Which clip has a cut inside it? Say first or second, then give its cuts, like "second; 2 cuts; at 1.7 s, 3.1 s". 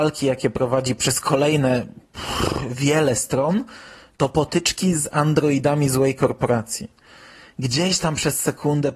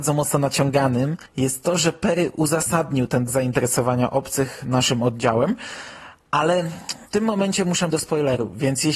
second; 4 cuts; at 1.3 s, 3.3 s, 7.1 s, 7.9 s